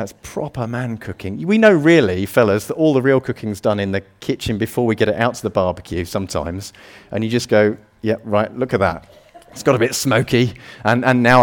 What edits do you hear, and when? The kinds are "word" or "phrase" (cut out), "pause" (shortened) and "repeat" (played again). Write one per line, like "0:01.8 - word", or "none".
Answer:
none